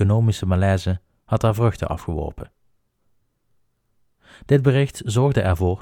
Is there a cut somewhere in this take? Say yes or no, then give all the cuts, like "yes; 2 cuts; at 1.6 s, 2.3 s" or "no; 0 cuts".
no; 0 cuts